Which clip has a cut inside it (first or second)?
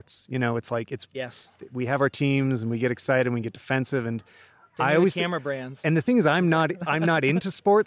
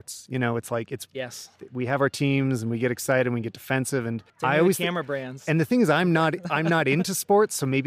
second